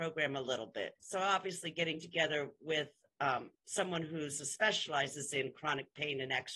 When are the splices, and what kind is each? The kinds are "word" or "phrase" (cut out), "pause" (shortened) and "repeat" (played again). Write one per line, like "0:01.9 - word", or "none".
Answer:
0:01.0 - pause
0:03.5 - pause